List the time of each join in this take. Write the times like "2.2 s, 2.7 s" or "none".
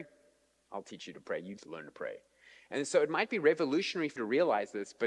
1.6 s, 4.2 s